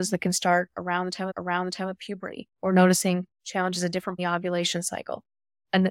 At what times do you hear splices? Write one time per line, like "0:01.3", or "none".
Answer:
0:01.3
0:02.5
0:04.2